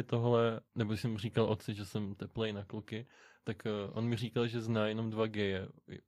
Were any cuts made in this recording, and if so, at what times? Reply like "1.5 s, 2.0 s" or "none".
none